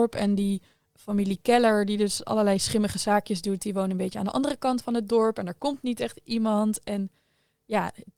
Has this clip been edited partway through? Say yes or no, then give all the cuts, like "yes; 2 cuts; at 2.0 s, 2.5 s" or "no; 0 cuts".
no; 0 cuts